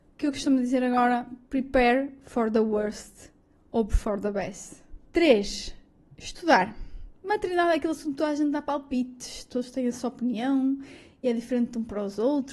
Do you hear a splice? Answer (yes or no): yes